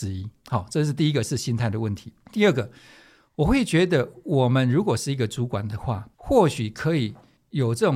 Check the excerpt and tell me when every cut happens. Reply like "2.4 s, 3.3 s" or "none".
6.1 s